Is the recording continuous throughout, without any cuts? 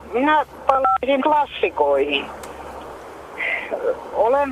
no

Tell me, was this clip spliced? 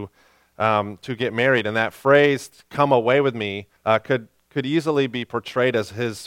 yes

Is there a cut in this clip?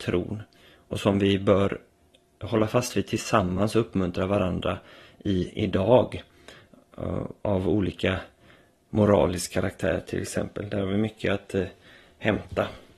no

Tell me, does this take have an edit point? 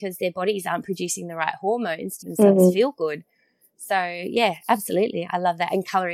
yes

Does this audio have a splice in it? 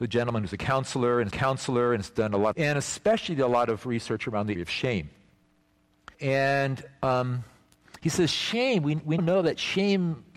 yes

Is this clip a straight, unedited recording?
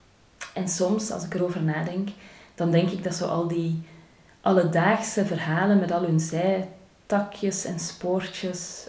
no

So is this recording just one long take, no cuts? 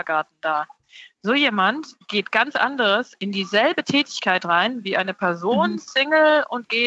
yes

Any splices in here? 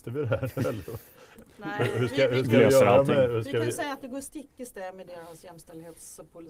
no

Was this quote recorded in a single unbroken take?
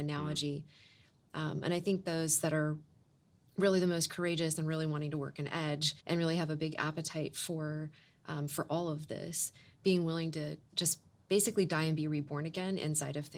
no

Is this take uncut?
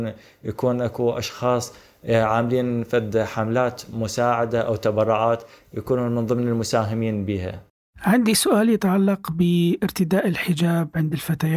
yes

